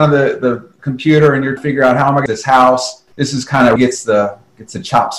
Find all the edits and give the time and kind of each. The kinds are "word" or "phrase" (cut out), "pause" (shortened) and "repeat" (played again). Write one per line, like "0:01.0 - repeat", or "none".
0:01.6 - word
0:02.3 - phrase
0:03.1 - pause
0:03.8 - word